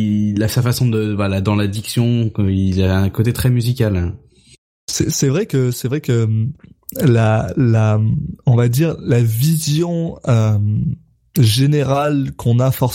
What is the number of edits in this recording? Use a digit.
0